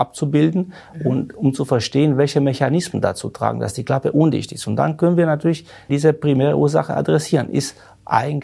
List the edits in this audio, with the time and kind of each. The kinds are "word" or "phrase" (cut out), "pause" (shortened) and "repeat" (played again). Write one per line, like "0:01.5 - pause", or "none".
0:05.9 - word